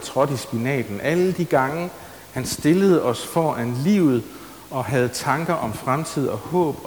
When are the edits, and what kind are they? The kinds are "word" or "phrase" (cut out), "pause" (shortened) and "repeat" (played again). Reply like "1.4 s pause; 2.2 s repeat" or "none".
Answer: none